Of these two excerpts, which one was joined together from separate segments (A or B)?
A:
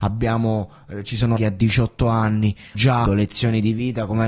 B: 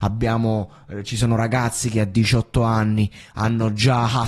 A